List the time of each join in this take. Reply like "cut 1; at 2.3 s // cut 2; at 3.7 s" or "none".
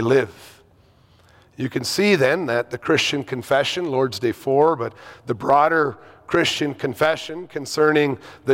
none